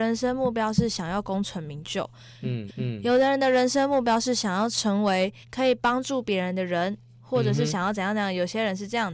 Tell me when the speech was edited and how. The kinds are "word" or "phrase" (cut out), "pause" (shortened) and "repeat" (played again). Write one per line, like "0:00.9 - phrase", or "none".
0:02.7 - repeat
0:05.4 - pause